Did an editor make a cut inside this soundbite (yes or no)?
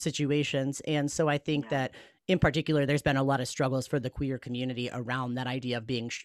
no